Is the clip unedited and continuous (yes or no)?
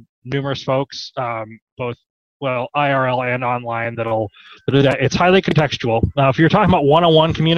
yes